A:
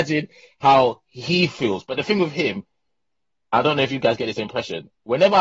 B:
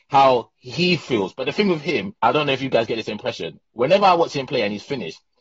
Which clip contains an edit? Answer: B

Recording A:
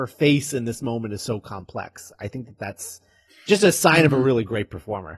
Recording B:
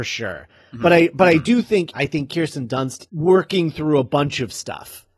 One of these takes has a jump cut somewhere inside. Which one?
B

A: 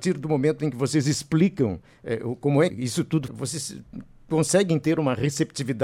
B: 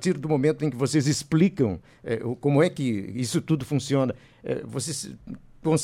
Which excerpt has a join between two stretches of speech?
A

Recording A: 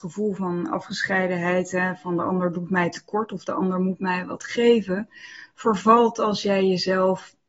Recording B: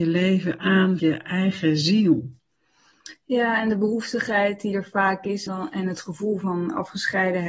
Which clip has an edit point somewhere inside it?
B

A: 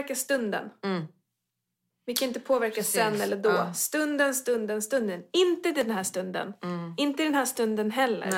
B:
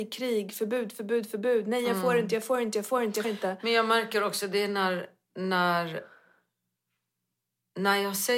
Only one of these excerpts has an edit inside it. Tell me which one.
B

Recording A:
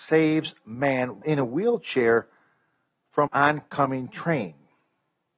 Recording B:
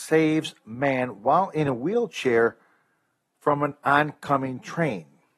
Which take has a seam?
A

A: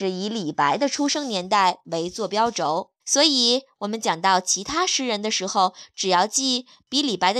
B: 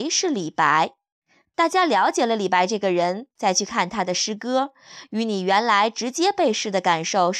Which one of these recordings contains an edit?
A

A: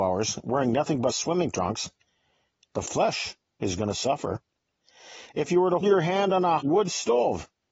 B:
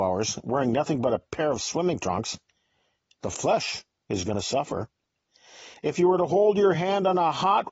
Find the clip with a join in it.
A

